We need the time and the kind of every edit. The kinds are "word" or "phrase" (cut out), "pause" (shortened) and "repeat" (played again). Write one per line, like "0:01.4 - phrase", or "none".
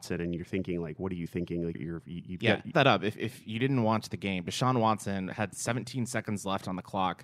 0:01.7 - word
0:02.7 - phrase
0:03.1 - word